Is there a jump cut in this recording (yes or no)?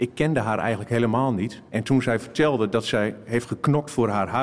yes